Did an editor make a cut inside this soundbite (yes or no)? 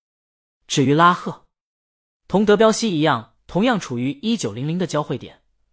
no